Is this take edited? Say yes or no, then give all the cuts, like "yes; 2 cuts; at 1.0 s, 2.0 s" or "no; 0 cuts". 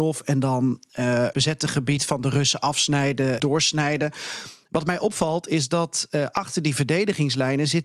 yes; 2 cuts; at 1.3 s, 3.4 s